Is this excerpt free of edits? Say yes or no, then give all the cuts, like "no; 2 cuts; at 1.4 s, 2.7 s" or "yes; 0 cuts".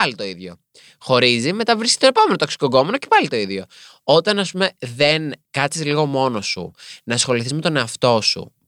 yes; 0 cuts